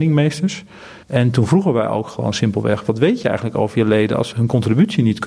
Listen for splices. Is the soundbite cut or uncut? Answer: cut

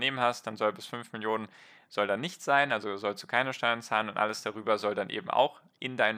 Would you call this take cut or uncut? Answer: uncut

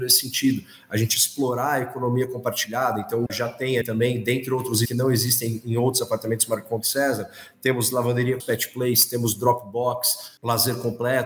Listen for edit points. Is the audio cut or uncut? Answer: cut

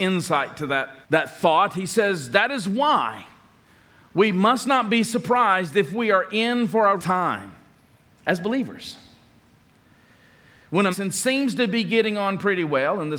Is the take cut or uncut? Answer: cut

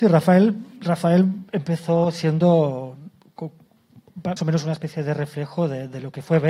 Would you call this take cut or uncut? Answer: cut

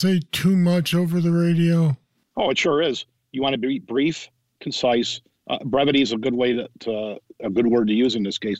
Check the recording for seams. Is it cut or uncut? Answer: uncut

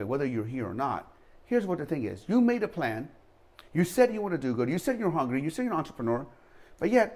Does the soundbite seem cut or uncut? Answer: uncut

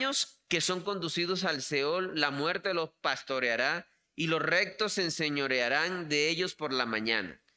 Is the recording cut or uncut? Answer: uncut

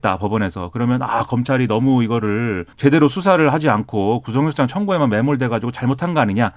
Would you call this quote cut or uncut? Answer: cut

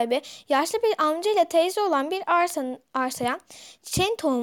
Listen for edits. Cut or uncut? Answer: uncut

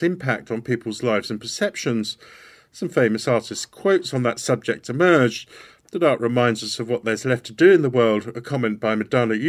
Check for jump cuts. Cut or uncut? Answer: uncut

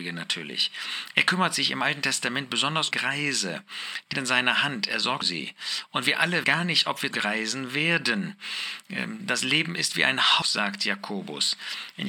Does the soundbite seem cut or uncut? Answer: cut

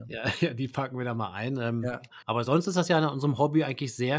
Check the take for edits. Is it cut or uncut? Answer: cut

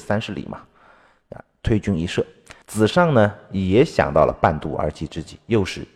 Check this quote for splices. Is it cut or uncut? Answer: cut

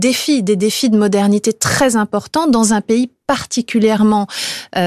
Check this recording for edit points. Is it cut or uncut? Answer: uncut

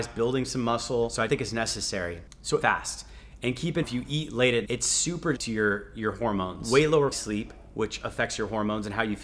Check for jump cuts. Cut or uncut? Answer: cut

